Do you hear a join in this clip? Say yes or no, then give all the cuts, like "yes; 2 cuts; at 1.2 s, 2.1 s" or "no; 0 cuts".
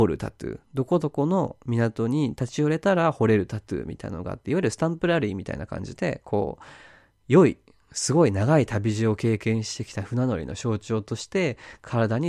no; 0 cuts